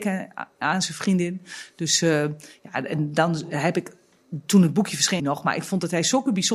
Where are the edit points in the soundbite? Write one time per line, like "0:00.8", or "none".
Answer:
0:05.2